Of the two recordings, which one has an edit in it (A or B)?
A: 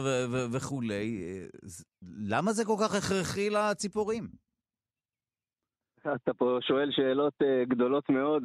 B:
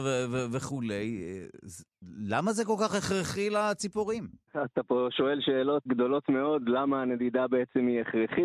B